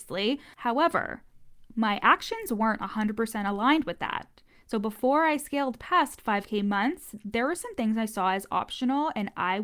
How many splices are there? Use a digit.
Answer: 0